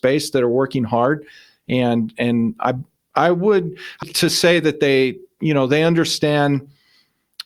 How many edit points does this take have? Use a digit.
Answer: 1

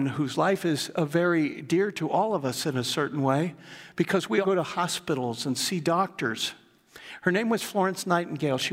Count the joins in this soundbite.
1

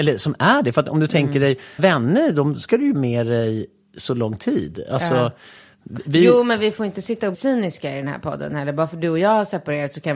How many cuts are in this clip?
3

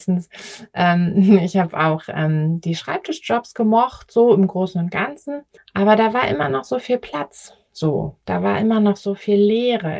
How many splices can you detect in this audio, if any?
2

